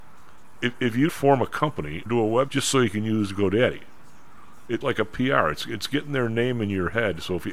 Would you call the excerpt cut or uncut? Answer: cut